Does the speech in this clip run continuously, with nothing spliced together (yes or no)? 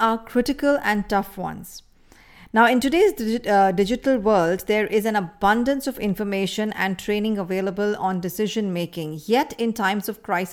yes